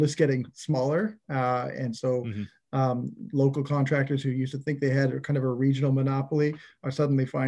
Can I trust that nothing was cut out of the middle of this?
yes; 0 cuts

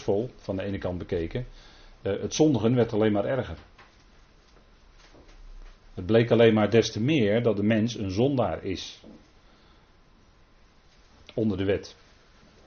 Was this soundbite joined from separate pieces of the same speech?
no; 0 cuts

